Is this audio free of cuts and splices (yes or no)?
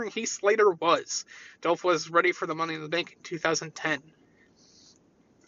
yes